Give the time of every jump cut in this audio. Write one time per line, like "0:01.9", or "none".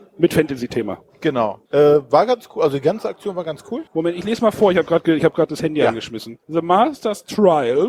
0:01.7
0:03.9
0:06.4